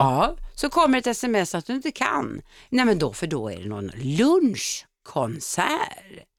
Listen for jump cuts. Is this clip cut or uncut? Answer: uncut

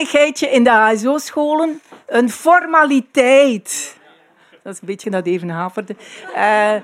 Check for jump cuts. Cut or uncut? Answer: cut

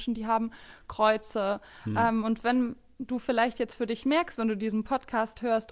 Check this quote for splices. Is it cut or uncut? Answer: uncut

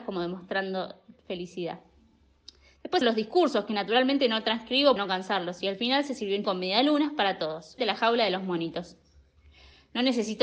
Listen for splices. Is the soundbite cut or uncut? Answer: cut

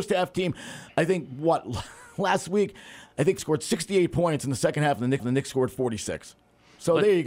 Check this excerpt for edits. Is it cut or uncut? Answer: cut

